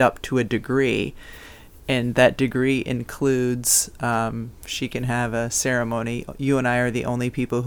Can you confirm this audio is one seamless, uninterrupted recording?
yes; 0 cuts

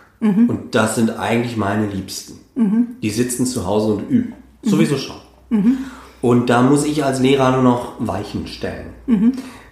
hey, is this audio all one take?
yes; 0 cuts

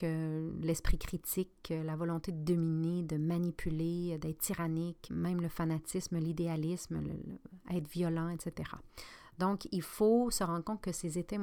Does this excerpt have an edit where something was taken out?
yes; 1 cut; at 5.1 s

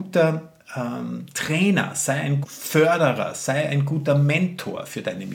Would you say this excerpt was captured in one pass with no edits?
no; 1 cut; at 2.4 s

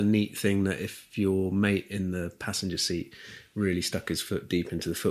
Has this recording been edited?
no; 0 cuts

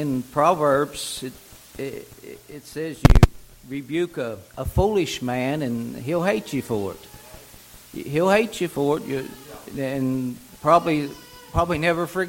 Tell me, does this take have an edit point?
yes; 1 cut; at 4.5 s

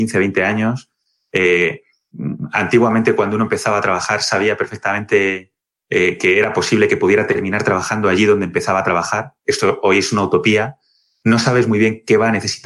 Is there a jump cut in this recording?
no; 0 cuts

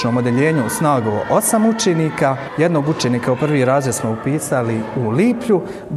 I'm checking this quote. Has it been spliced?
no; 0 cuts

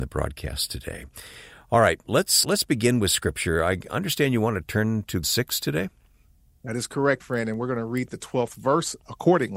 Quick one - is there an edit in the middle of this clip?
yes; 3 cuts; at 2.4 s, 5.2 s, 7.2 s

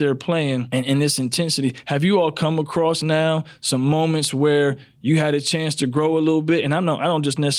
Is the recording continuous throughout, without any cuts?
yes; 0 cuts

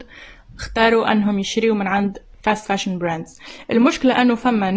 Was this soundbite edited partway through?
no; 0 cuts

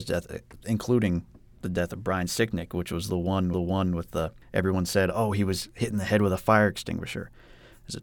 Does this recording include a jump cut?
yes; 1 cut; at 3.5 s

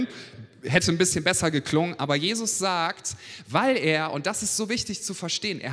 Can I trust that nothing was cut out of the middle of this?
yes; 0 cuts

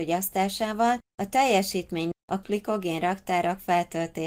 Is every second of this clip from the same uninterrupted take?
no; 3 cuts; at 1.1 s, 2.1 s, 2.4 s

